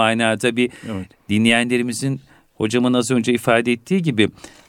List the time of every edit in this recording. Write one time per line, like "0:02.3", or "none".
none